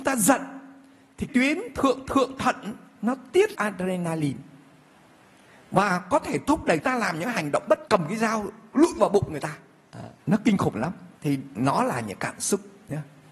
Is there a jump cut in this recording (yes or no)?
yes